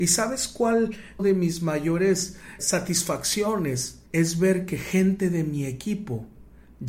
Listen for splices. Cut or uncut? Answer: cut